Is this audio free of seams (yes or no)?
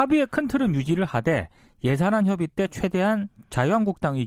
yes